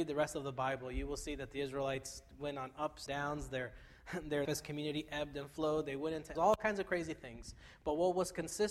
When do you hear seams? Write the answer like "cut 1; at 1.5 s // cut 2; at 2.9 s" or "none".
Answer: cut 1; at 3.1 s // cut 2; at 4.5 s // cut 3; at 6.4 s